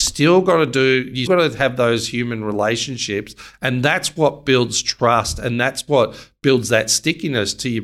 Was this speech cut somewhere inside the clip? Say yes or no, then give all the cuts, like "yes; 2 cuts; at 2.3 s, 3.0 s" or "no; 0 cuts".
yes; 1 cut; at 1.3 s